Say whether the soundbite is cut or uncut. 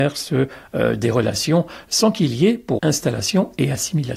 cut